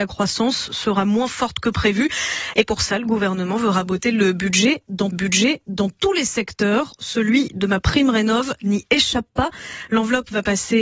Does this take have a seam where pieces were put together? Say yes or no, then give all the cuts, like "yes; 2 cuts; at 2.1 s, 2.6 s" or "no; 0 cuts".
yes; 1 cut; at 5.1 s